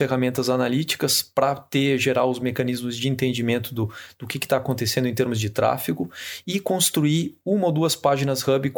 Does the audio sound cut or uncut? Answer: uncut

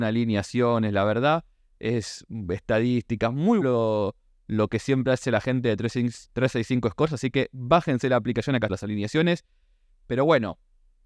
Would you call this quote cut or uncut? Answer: cut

